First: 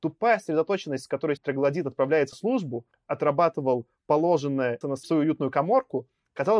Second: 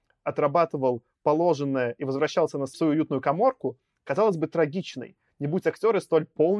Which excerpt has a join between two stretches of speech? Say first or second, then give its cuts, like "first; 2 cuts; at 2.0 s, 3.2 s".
first; 4 cuts; at 1.4 s, 2.3 s, 2.9 s, 4.8 s